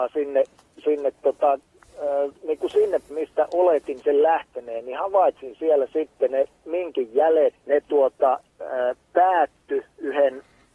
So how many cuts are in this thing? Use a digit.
3